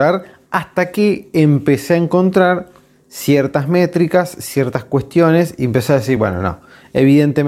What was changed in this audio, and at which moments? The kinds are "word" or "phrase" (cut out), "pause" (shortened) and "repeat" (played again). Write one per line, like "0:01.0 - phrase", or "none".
none